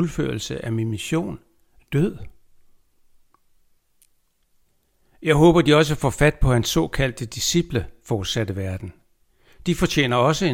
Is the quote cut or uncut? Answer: uncut